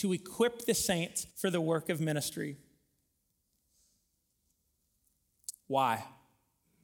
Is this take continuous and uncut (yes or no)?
no